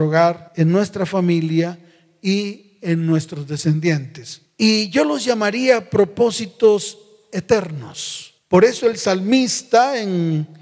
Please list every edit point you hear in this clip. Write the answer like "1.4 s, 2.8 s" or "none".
none